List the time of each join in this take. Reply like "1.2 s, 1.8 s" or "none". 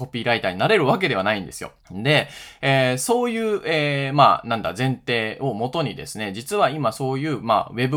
1.8 s